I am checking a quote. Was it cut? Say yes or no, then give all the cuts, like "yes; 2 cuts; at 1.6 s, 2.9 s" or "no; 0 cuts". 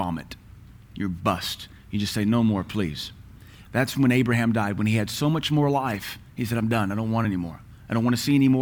no; 0 cuts